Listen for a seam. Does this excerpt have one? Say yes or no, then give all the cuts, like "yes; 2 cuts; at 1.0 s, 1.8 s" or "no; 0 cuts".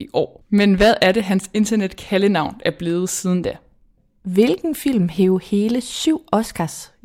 no; 0 cuts